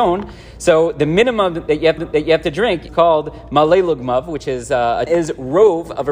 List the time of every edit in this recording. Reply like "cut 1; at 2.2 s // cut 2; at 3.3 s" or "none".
cut 1; at 2.0 s // cut 2; at 2.9 s // cut 3; at 5.1 s